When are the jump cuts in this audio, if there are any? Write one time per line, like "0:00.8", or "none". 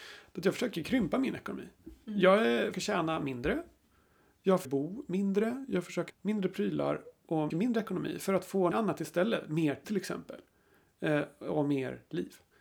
0:02.7
0:04.6
0:06.1
0:07.5
0:08.7
0:09.8